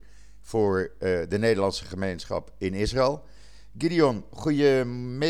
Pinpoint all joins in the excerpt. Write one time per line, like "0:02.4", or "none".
none